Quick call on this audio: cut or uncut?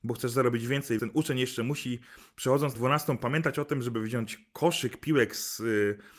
cut